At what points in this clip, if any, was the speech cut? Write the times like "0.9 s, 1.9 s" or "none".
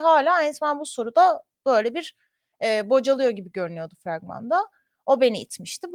none